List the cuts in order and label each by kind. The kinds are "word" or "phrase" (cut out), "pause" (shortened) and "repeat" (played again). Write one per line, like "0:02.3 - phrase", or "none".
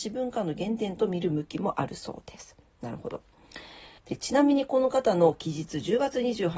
0:04.0 - pause